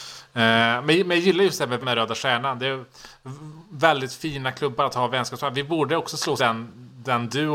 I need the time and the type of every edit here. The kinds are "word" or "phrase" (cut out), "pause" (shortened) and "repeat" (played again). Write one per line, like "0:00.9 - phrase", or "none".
0:01.8 - word
0:06.4 - phrase